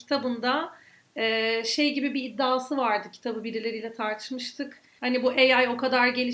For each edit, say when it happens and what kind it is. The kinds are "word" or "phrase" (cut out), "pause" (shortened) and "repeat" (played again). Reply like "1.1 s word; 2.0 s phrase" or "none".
none